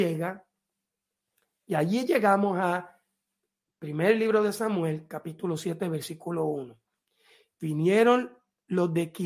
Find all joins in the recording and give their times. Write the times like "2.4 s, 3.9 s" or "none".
none